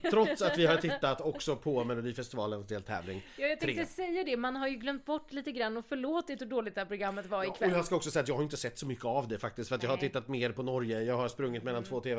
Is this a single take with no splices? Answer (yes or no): yes